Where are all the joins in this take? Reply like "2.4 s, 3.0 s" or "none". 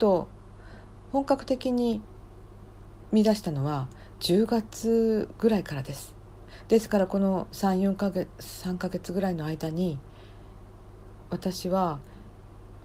none

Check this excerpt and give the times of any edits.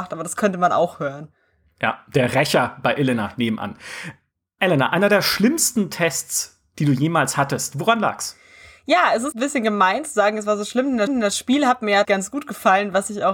9.3 s, 11.1 s, 12.0 s

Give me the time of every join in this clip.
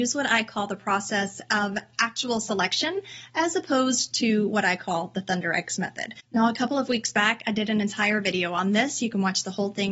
6.2 s

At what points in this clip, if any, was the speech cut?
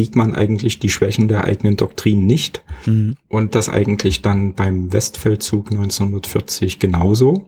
3.5 s

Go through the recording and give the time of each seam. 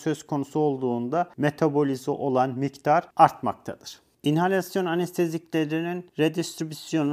none

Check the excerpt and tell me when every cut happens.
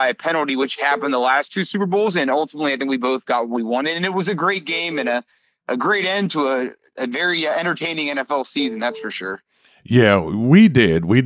none

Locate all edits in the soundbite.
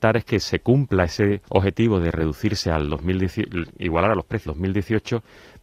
1.4 s, 4.5 s

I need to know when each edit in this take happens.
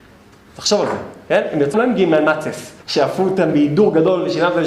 1.7 s, 2.8 s

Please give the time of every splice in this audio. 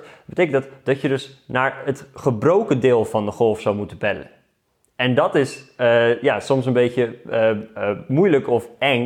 none

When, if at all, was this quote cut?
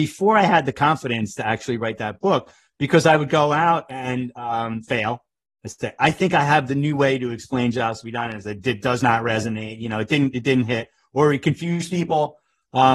none

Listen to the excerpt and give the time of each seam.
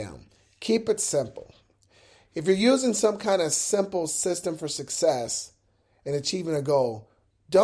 none

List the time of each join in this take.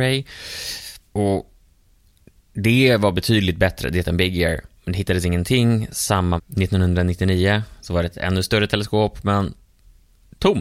1.1 s, 4.0 s, 4.8 s, 6.4 s

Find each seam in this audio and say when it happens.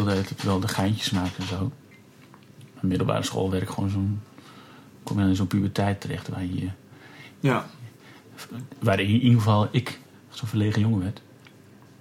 10.1 s

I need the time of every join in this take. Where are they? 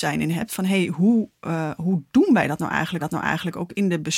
3.0 s

